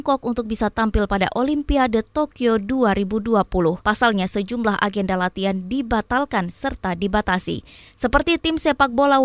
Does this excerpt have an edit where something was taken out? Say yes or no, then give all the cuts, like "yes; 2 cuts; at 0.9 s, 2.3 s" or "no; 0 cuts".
yes; 1 cut; at 3.8 s